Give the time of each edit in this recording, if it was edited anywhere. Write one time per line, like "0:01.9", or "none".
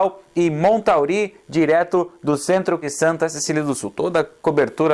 0:02.8